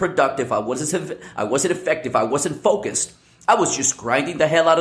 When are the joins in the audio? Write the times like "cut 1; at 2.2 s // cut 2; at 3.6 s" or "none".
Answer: none